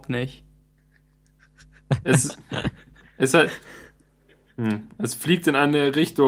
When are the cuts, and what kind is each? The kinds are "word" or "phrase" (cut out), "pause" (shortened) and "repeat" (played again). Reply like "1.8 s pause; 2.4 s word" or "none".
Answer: none